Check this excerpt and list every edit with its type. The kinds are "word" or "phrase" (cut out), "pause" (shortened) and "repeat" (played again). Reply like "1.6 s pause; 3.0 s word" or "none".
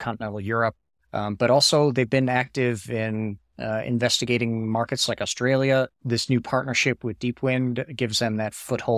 5.9 s pause